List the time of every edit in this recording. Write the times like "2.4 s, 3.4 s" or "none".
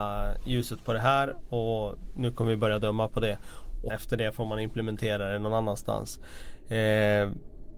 3.9 s